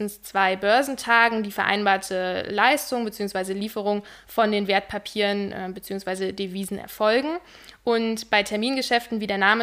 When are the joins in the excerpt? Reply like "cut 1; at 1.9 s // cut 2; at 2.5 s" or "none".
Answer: none